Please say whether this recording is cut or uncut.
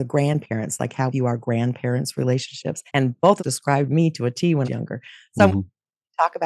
cut